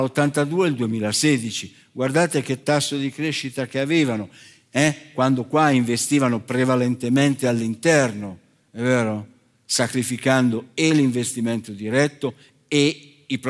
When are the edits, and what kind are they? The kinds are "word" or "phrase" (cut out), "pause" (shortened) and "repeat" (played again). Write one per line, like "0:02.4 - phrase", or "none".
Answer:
none